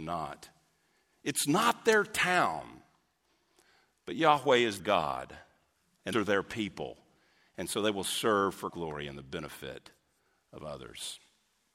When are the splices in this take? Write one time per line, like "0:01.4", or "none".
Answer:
0:04.8
0:06.1
0:08.7